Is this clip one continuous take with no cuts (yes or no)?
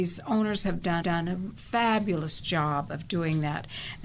no